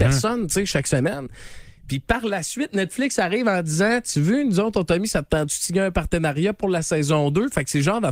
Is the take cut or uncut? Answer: uncut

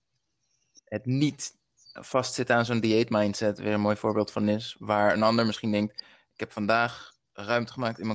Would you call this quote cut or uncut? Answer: uncut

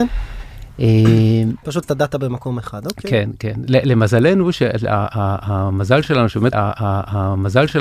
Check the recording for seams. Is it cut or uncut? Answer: cut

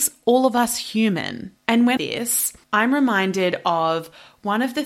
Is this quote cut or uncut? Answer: cut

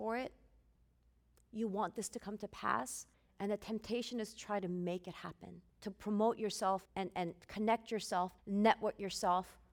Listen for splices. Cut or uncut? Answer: cut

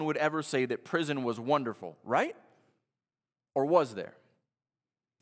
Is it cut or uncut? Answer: uncut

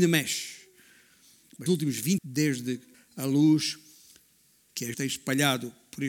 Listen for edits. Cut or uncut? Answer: cut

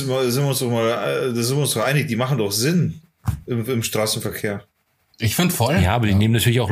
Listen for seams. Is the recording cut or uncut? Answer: uncut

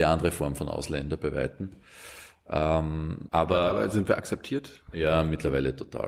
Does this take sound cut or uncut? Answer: cut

